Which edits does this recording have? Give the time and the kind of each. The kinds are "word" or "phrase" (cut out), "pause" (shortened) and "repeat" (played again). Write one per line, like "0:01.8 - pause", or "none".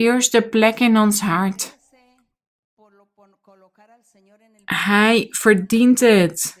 none